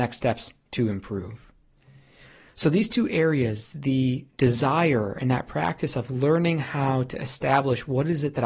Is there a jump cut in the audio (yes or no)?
no